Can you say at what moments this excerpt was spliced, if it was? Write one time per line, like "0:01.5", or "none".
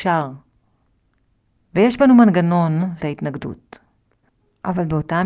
0:03.0